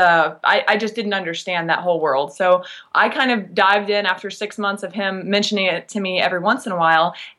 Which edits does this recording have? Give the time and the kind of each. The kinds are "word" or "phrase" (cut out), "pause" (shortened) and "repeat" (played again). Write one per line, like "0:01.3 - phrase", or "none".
none